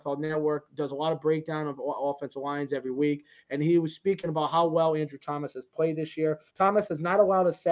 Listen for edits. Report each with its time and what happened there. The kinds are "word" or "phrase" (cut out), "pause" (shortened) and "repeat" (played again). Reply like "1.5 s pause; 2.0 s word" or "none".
6.5 s pause